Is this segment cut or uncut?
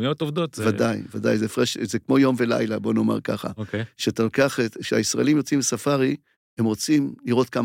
cut